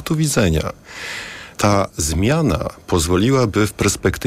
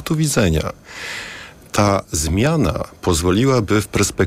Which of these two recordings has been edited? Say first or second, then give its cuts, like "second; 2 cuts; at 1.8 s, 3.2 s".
first; 1 cut; at 1.5 s